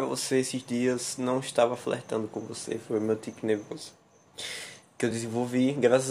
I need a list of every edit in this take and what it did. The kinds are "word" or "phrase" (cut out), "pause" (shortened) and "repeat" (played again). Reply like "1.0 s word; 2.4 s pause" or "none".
none